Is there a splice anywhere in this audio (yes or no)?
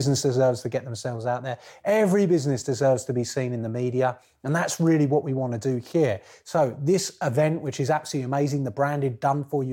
no